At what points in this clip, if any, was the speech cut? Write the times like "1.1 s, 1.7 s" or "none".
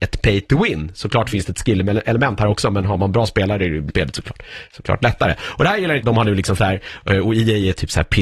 3.9 s, 6.0 s, 6.6 s